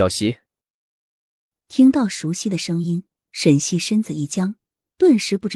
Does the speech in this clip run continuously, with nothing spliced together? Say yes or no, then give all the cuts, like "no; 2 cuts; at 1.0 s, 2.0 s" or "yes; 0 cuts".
yes; 0 cuts